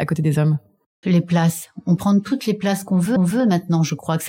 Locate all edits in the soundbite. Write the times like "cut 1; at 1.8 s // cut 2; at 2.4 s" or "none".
cut 1; at 1.0 s // cut 2; at 2.0 s // cut 3; at 3.2 s